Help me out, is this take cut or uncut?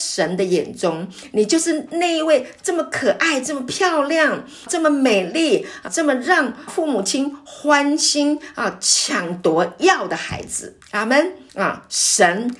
cut